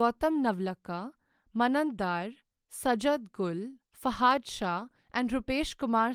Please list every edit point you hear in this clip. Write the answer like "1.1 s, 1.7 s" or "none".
none